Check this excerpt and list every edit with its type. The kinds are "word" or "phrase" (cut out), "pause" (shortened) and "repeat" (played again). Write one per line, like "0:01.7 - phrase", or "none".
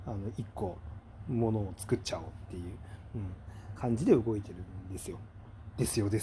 none